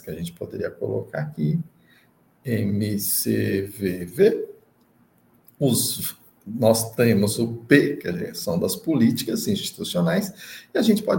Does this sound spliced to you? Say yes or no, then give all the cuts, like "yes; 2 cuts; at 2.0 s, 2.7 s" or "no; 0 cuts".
no; 0 cuts